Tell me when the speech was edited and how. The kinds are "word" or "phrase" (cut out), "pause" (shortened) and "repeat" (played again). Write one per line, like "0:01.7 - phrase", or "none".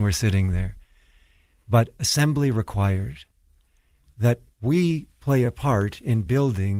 none